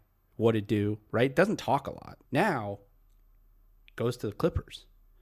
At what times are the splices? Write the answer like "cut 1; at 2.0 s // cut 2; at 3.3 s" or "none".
cut 1; at 2.3 s